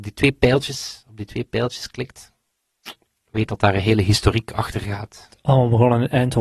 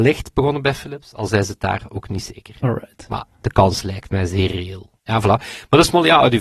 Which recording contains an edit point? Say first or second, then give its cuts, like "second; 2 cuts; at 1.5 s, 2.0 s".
second; 1 cut; at 5.0 s